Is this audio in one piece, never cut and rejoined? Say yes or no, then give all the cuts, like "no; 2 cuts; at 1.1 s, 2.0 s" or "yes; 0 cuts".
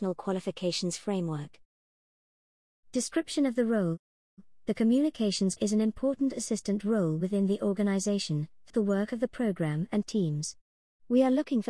no; 3 cuts; at 5.6 s, 8.7 s, 10.0 s